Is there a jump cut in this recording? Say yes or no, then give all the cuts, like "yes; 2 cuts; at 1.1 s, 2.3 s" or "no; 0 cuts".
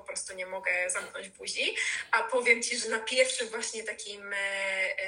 no; 0 cuts